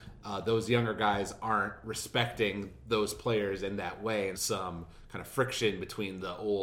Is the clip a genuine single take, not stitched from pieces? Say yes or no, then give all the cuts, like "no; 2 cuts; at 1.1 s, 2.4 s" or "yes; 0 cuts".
no; 1 cut; at 4.3 s